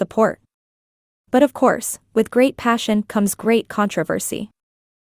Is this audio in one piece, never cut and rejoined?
yes; 0 cuts

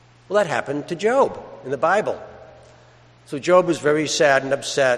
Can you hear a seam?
no; 0 cuts

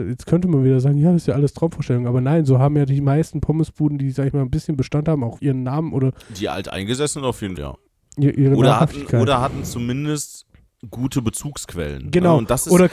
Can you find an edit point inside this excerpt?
yes; 2 cuts; at 5.4 s, 7.6 s

